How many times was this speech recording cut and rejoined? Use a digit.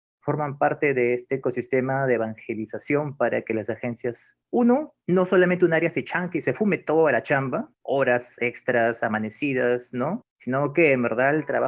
3